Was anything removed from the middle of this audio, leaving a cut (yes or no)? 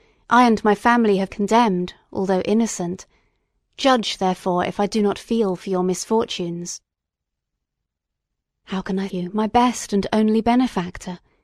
yes